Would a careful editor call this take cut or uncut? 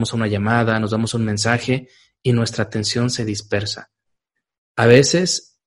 uncut